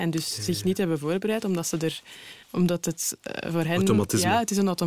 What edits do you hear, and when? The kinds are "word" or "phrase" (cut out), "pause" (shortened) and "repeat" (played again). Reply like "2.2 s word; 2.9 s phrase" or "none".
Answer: 2.4 s pause